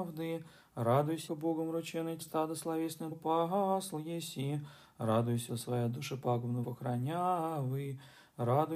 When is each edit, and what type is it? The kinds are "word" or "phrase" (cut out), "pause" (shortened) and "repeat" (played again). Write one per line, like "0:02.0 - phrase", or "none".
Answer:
0:01.3 - word
0:02.2 - word
0:03.1 - word
0:05.5 - word
0:06.6 - word

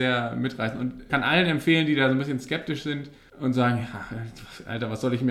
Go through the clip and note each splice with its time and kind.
0:01.1 - word

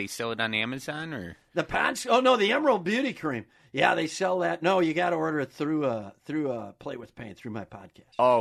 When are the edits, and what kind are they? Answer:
none

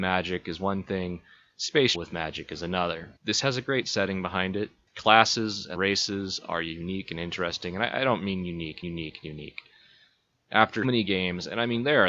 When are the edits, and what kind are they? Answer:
0:01.9 - word
0:03.2 - pause
0:05.7 - word
0:08.8 - repeat
0:10.8 - word

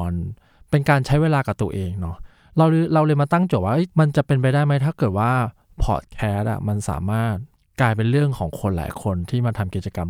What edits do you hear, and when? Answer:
0:03.9 - pause
0:07.5 - pause

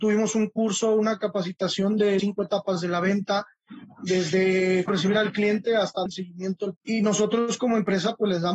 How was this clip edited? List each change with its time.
0:02.2 - word
0:04.9 - word
0:06.1 - word
0:06.8 - word

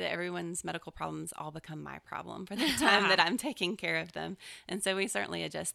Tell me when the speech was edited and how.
none

